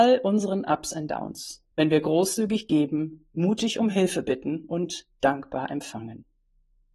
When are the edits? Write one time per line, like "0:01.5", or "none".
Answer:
0:01.7